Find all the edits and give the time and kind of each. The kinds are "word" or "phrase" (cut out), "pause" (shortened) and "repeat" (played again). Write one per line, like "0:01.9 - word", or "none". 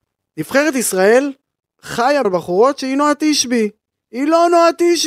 0:02.2 - phrase